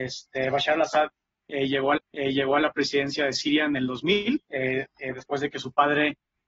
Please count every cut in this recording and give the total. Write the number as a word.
two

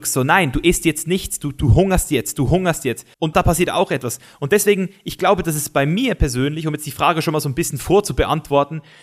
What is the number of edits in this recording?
one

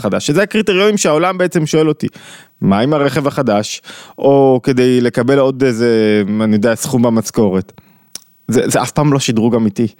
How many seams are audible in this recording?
zero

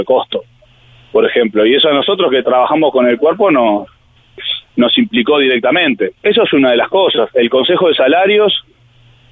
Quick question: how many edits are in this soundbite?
one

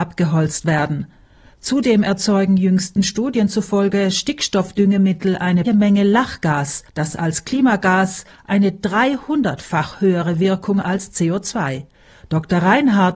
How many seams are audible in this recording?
three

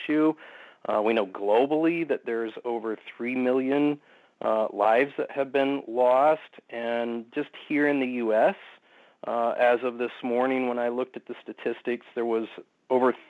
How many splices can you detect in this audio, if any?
zero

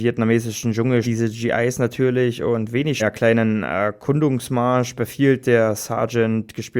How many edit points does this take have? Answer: two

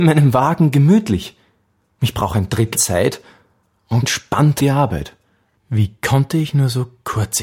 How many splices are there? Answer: three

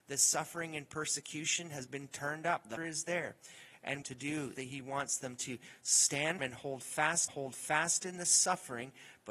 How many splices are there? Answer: five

